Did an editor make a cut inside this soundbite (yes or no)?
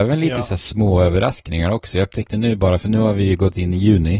no